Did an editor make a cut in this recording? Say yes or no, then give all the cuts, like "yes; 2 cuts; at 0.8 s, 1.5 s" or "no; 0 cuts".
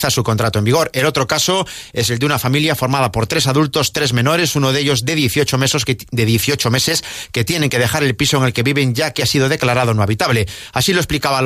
no; 0 cuts